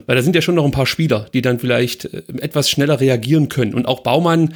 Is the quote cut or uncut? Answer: uncut